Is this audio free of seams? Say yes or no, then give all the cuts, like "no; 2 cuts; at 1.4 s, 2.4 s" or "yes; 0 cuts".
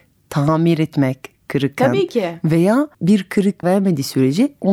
no; 2 cuts; at 2.9 s, 3.6 s